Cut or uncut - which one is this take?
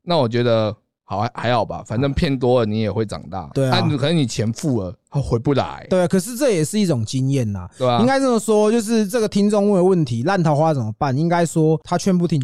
cut